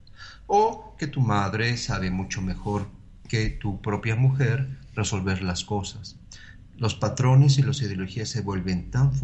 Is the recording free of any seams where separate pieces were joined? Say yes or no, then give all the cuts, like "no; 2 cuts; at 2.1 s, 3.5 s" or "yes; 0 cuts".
yes; 0 cuts